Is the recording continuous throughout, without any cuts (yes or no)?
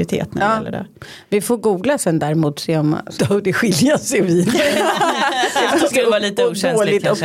no